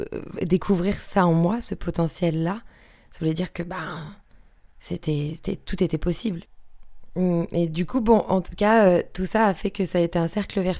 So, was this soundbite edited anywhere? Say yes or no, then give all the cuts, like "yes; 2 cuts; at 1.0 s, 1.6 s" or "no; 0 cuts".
no; 0 cuts